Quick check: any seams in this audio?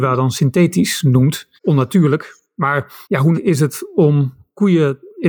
yes; 3 cuts; at 1.6 s, 3.0 s, 3.3 s

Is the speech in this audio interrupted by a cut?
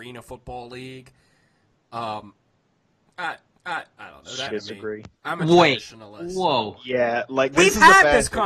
yes; 3 cuts; at 3.5 s, 4.5 s, 5.2 s

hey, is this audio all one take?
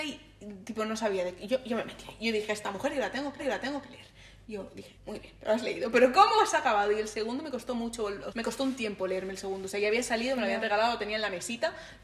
no; 3 cuts; at 3.4 s, 5.0 s, 8.3 s

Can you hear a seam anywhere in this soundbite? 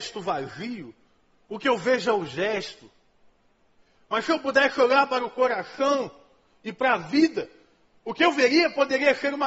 no; 0 cuts

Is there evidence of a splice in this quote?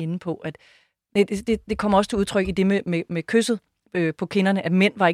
no; 0 cuts

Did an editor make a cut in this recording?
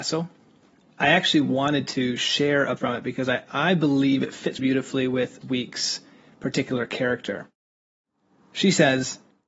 yes; 5 cuts; at 0.9 s, 2.8 s, 3.5 s, 4.6 s, 5.4 s

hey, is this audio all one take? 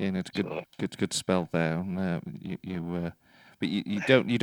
yes; 0 cuts

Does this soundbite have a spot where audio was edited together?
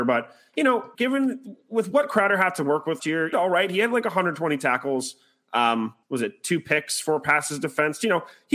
yes; 4 cuts; at 0.9 s, 3.0 s, 3.3 s, 6.0 s

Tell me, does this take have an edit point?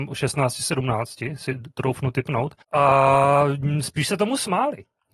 yes; 1 cut; at 2.6 s

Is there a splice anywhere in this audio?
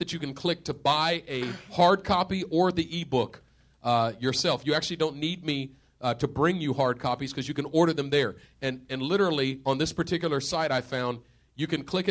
no; 0 cuts

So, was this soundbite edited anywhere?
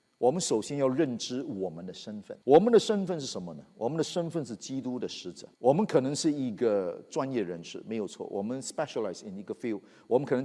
yes; 2 cuts; at 2.4 s, 5.5 s

